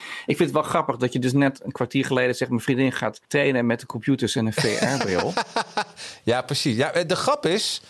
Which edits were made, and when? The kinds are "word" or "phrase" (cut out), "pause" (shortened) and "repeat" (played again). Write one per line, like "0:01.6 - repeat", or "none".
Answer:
0:03.2 - pause